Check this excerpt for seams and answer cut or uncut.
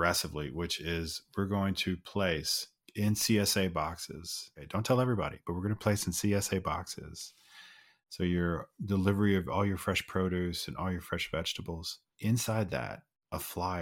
uncut